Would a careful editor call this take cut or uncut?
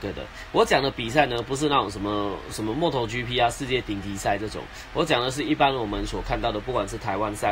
uncut